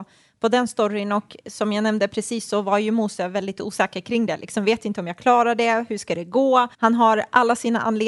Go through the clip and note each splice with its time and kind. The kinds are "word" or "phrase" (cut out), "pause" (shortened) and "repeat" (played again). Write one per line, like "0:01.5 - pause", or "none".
0:06.7 - pause